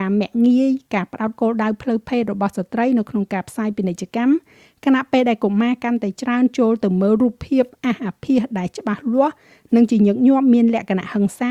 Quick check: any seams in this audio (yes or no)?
no